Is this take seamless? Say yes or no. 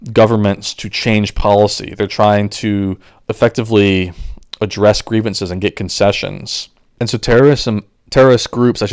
yes